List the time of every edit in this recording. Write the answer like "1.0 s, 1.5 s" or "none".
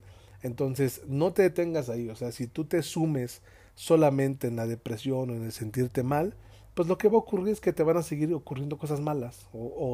none